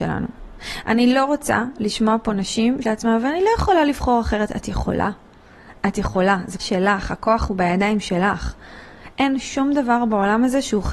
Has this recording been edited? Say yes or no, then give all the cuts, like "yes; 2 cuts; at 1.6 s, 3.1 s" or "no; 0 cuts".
yes; 2 cuts; at 2.8 s, 6.6 s